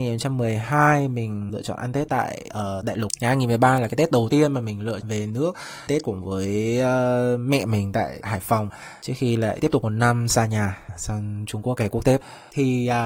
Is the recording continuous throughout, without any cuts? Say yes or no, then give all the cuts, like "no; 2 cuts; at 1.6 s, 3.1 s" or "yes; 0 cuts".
no; 4 cuts; at 1.5 s, 5.0 s, 5.9 s, 8.2 s